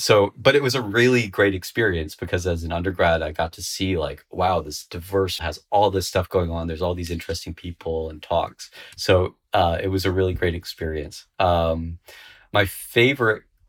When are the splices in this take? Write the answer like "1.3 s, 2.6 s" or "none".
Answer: 5.4 s, 8.9 s